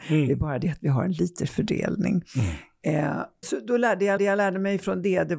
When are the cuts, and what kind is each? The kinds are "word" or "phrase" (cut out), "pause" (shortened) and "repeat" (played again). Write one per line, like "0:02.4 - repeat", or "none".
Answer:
0:01.5 - word
0:03.4 - word
0:04.2 - repeat